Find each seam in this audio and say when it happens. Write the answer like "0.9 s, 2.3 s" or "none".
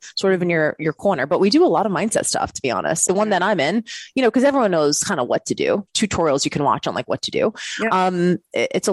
3.1 s, 5.9 s